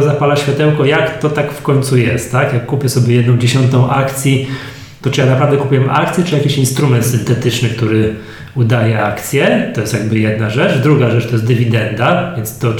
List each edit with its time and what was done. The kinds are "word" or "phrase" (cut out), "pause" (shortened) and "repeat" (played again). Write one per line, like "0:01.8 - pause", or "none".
none